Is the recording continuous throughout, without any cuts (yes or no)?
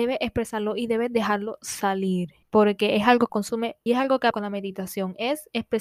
no